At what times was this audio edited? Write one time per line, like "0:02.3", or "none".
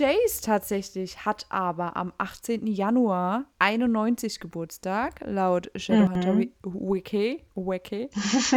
0:03.5